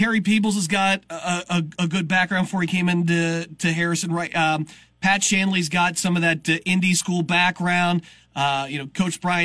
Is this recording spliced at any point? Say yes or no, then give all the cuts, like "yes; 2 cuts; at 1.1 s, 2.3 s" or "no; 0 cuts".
no; 0 cuts